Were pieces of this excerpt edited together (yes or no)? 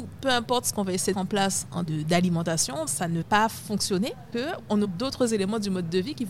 yes